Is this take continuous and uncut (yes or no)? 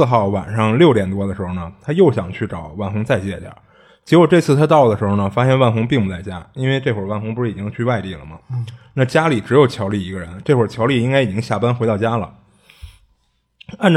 yes